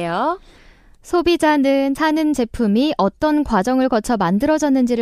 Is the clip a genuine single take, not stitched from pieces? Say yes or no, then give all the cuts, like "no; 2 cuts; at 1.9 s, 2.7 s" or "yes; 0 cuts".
no; 1 cut; at 1.9 s